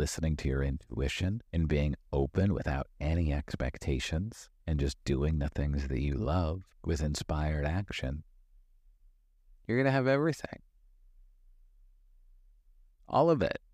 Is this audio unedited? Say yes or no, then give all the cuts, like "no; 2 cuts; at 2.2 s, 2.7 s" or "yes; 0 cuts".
no; 3 cuts; at 1.5 s, 4.6 s, 6.7 s